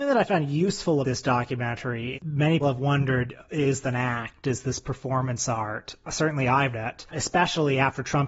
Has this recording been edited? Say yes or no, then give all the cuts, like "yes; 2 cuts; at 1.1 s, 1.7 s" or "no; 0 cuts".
yes; 6 cuts; at 1.0 s, 2.1 s, 2.6 s, 3.8 s, 6.7 s, 7.1 s